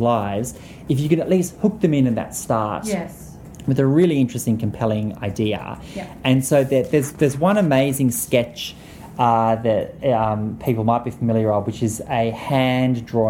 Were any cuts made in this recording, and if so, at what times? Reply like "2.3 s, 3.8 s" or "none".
none